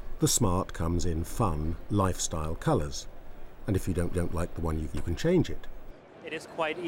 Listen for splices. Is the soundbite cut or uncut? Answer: cut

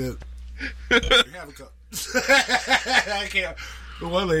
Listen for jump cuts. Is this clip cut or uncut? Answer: cut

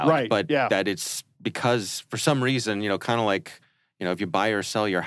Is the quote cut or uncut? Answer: uncut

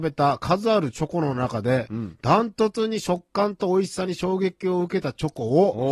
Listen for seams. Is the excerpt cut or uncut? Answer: uncut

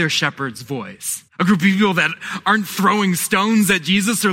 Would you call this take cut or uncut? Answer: cut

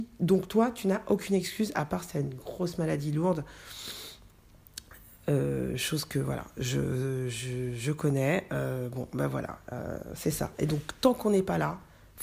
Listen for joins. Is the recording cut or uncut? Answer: uncut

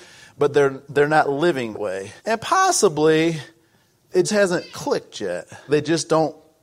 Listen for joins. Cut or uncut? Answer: cut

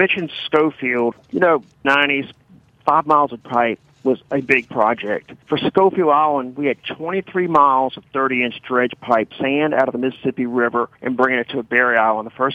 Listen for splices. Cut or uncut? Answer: cut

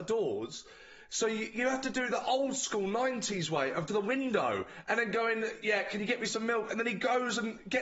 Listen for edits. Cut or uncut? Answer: cut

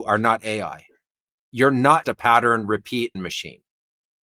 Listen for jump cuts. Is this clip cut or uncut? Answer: cut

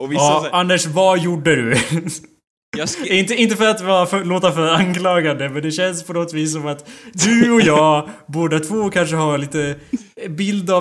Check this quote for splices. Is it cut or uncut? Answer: uncut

